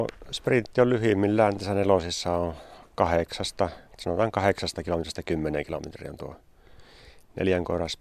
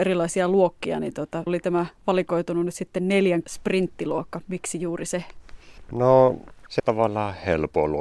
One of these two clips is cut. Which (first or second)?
second